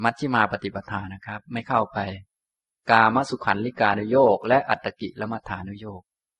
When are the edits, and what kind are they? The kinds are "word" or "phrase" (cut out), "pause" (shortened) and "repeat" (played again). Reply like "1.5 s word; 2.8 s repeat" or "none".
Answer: none